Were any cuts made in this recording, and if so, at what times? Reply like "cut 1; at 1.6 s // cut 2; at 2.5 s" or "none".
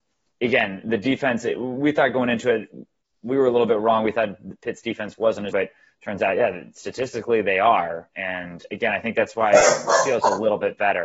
cut 1; at 5.5 s // cut 2; at 8.1 s

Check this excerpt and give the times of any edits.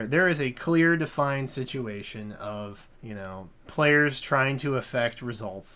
cut 1; at 2.9 s // cut 2; at 3.6 s

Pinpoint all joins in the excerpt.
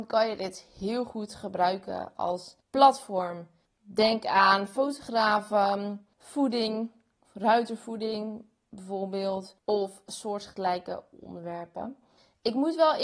none

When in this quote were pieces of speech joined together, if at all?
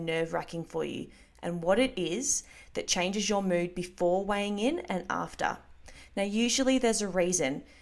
none

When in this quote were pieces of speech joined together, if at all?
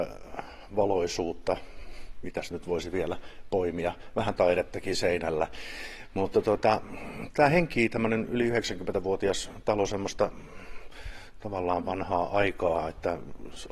cut 1; at 2.5 s

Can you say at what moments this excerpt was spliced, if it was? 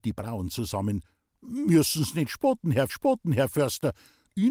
cut 1; at 2.9 s

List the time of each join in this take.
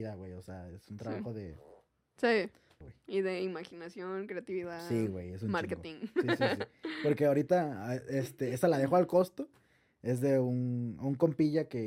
cut 1; at 2.8 s

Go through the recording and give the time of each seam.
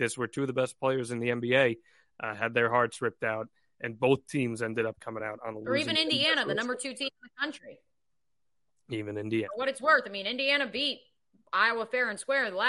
none

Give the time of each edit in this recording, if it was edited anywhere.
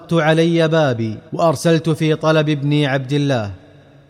cut 1; at 1.3 s

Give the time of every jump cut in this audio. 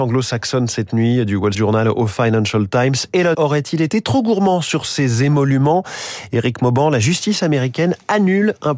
cut 1; at 1.5 s // cut 2; at 3.3 s

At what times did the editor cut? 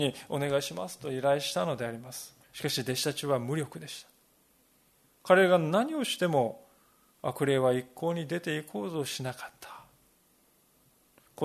cut 1; at 2.4 s

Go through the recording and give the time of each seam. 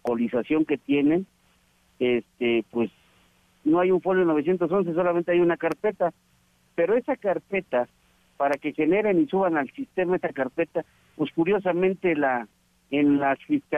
none

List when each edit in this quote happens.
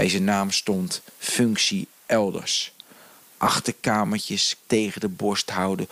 cut 1; at 4.6 s

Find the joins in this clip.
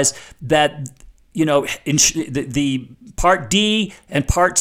none

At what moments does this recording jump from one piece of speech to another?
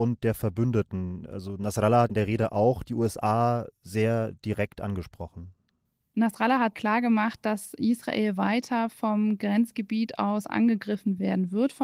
cut 1; at 2.1 s // cut 2; at 6.7 s

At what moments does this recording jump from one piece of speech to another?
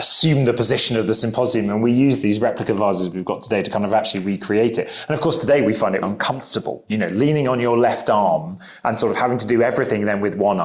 cut 1; at 6.0 s

